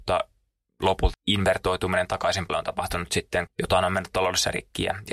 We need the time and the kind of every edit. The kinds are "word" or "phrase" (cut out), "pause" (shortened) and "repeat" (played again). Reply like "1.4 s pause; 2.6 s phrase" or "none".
1.1 s word; 2.5 s word; 3.5 s word